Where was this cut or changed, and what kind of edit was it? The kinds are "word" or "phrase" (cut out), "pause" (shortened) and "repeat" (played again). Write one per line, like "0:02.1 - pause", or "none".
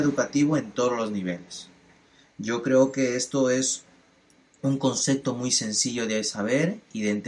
none